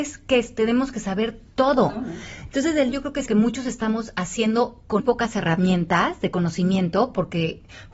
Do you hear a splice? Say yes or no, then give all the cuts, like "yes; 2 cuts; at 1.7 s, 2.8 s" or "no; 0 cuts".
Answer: yes; 3 cuts; at 2.9 s, 3.3 s, 5.0 s